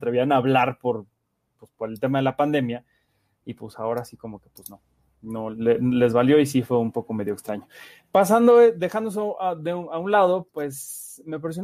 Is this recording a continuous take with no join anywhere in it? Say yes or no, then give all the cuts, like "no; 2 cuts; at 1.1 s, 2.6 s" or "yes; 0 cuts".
yes; 0 cuts